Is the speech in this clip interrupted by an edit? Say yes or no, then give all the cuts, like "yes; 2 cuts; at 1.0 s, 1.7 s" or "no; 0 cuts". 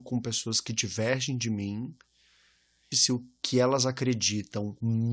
yes; 1 cut; at 2.9 s